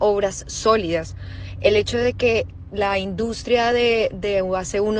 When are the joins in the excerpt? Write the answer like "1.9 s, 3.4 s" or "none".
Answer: none

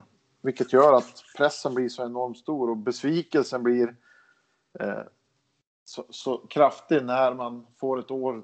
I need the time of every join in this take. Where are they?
none

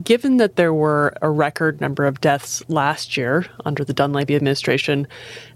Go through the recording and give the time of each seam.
none

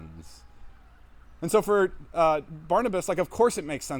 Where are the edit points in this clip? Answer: none

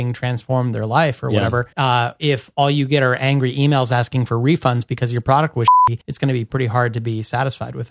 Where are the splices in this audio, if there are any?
1.7 s, 6.0 s

